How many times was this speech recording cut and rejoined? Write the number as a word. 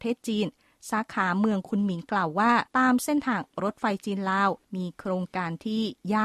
two